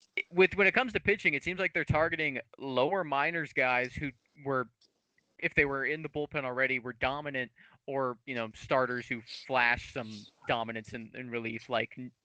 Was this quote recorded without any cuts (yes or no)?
yes